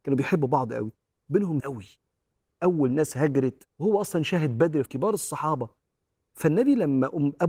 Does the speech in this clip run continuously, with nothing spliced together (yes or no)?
no